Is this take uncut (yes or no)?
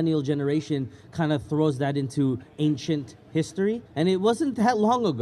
no